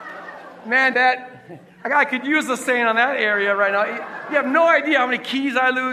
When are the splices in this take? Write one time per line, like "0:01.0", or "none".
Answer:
0:00.9